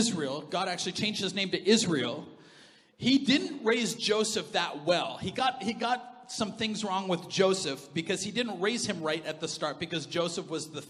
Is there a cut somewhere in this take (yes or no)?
no